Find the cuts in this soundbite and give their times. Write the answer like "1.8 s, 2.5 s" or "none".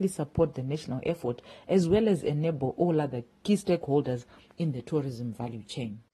none